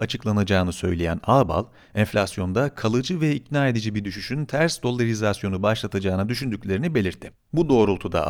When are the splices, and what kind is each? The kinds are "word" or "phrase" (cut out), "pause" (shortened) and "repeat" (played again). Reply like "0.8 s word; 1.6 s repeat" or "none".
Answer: none